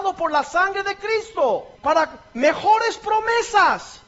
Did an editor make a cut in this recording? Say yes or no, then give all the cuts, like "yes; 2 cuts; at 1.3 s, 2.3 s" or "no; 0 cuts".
yes; 1 cut; at 1.8 s